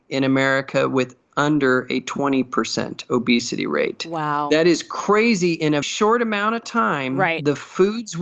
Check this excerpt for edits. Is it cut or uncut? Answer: cut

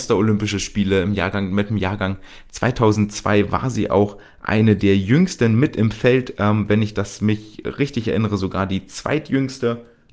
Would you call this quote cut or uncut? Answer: uncut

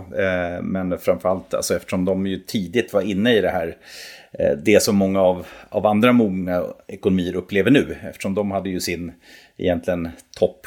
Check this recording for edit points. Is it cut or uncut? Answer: uncut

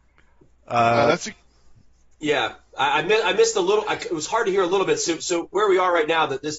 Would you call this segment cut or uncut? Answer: uncut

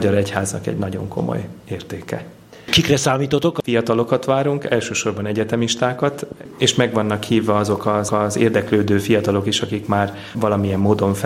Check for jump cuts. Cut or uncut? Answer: cut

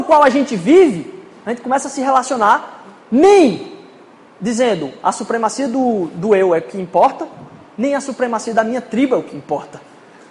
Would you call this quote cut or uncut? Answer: uncut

